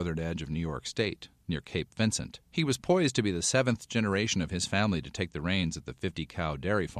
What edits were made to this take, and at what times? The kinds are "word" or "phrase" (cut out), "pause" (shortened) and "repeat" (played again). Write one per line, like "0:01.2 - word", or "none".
0:02.4 - pause